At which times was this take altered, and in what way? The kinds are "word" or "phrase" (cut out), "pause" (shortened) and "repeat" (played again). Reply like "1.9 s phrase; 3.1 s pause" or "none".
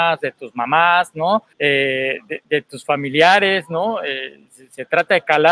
1.5 s pause

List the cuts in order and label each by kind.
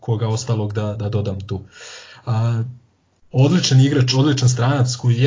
none

